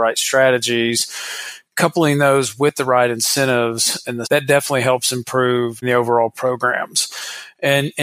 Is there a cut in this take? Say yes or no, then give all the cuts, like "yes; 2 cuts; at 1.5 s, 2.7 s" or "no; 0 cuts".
yes; 2 cuts; at 4.2 s, 5.8 s